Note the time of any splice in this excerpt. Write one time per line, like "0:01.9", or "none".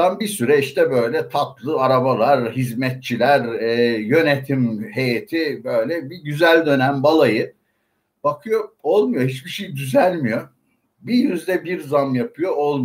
none

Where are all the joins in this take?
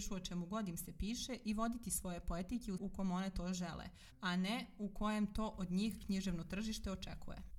0:02.8

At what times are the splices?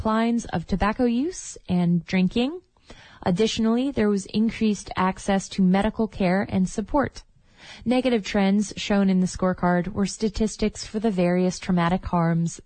0:02.1

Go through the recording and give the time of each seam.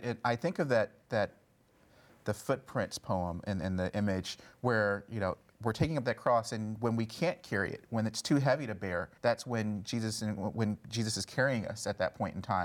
0:09.2

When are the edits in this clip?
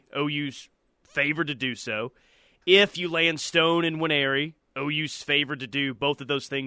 none

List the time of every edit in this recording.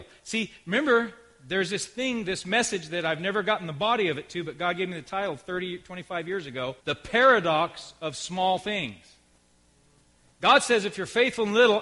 0:06.8

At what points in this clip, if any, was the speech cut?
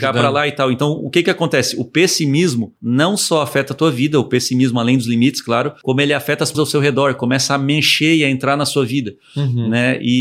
0:06.5

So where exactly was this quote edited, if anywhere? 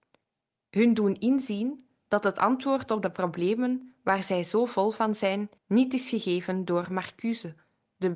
0:05.6

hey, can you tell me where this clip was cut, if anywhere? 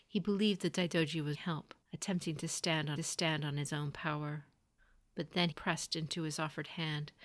0:01.3
0:01.8
0:03.0
0:04.8
0:05.5

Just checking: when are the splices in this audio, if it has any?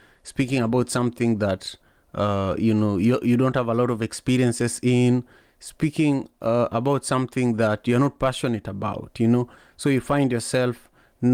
none

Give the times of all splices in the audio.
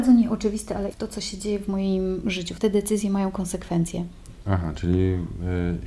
0:00.9
0:02.6

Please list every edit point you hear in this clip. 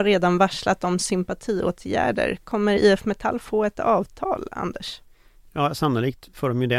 none

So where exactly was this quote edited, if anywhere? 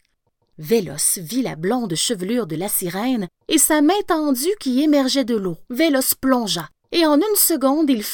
0:05.7

